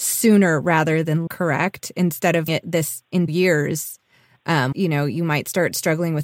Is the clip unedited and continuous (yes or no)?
no